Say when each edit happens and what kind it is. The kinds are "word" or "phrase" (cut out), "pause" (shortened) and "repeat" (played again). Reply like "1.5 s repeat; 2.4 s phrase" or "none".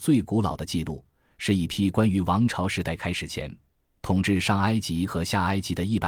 none